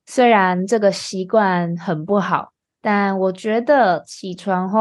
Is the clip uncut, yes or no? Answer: no